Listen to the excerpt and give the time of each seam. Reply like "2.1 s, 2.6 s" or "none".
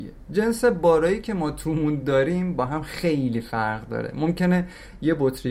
none

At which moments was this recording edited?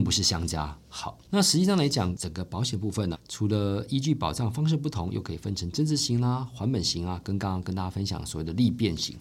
1.2 s, 3.1 s

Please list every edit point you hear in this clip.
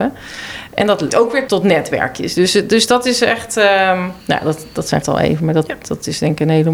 1.1 s, 1.5 s, 4.2 s, 5.0 s

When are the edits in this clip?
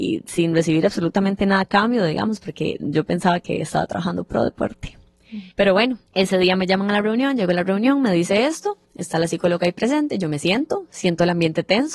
5.5 s, 6.1 s, 8.8 s

